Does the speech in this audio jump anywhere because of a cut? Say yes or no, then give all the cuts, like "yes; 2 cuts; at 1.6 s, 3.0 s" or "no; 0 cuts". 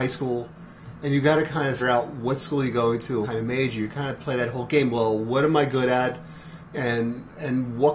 yes; 2 cuts; at 1.8 s, 3.2 s